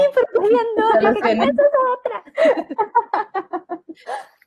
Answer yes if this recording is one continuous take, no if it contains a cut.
yes